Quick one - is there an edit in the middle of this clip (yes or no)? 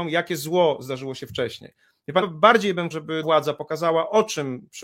yes